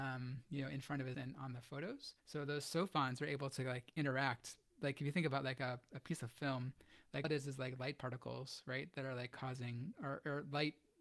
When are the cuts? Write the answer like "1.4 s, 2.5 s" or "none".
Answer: 1.1 s, 2.2 s, 7.2 s